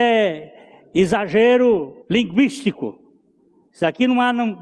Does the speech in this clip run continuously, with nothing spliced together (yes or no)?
no